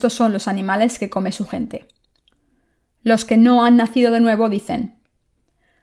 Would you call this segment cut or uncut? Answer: uncut